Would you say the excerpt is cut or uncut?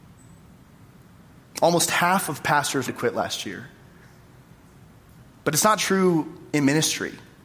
cut